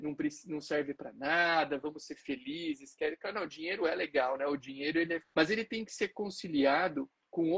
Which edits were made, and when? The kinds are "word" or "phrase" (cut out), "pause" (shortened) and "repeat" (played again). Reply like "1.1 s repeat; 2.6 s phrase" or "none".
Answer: 5.2 s phrase